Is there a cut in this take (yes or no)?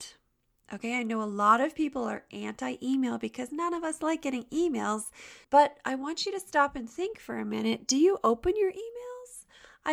yes